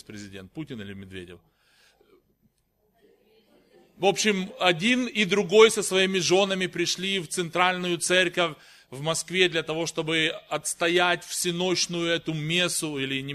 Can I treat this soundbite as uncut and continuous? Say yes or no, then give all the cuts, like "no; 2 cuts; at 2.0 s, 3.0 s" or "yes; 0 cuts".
yes; 0 cuts